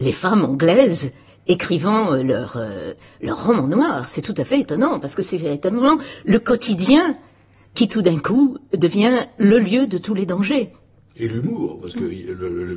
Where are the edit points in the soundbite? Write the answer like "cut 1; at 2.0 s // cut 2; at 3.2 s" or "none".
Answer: none

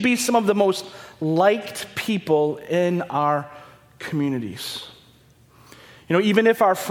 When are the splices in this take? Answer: none

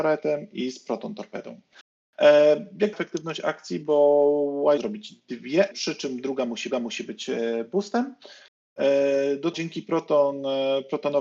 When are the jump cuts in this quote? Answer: cut 1; at 2.9 s // cut 2; at 4.8 s // cut 3; at 5.7 s // cut 4; at 6.7 s // cut 5; at 9.5 s

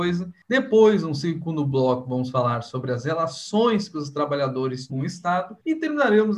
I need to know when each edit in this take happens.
cut 1; at 4.9 s

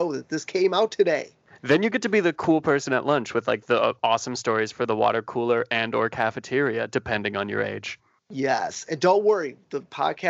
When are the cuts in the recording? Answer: none

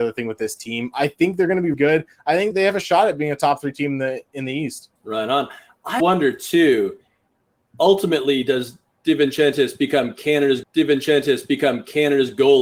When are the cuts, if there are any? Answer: cut 1; at 1.7 s // cut 2; at 2.5 s // cut 3; at 5.0 s // cut 4; at 6.0 s // cut 5; at 10.6 s

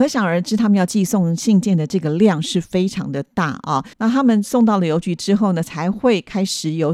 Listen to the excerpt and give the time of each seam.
cut 1; at 3.9 s

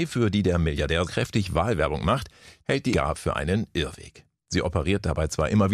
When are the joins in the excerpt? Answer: cut 1; at 1.1 s // cut 2; at 2.9 s

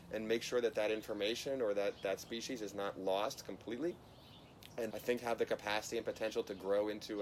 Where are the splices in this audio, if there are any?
cut 1; at 4.9 s

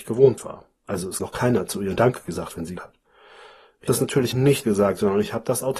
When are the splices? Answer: cut 1; at 1.2 s // cut 2; at 2.0 s // cut 3; at 2.8 s // cut 4; at 3.9 s // cut 5; at 4.3 s // cut 6; at 4.6 s

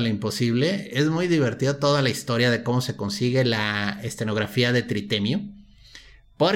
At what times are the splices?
none

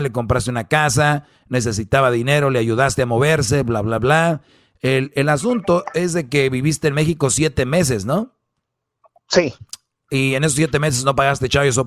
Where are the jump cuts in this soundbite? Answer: none

